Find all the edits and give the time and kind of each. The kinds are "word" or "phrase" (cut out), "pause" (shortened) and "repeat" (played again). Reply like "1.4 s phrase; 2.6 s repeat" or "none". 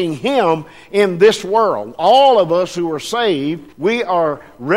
3.7 s pause

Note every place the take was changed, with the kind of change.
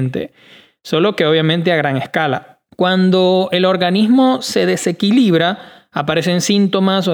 2.7 s pause

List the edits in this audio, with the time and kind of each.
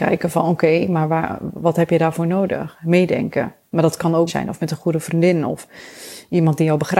4.3 s phrase

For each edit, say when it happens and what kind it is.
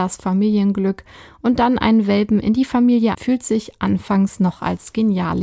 3.1 s word

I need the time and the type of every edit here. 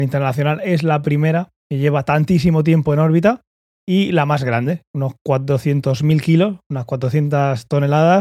none

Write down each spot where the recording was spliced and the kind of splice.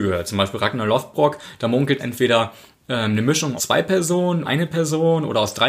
2.0 s phrase; 3.6 s word; 4.4 s word

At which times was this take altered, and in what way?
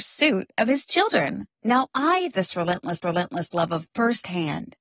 1.5 s pause; 2.3 s word; 3.0 s repeat; 3.9 s word

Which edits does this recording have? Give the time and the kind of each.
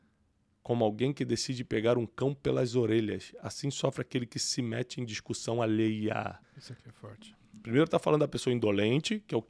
6.4 s pause

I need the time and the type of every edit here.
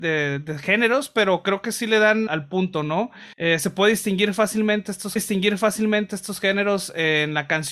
2.3 s word; 3.3 s pause; 5.2 s repeat

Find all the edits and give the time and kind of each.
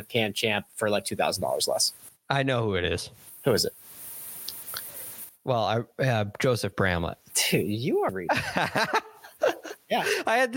8.1 s phrase

